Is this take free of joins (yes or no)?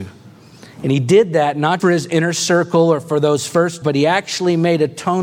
no